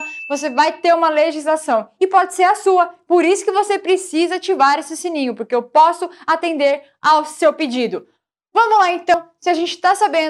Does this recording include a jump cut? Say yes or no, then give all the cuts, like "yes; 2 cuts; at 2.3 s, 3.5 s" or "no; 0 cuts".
no; 0 cuts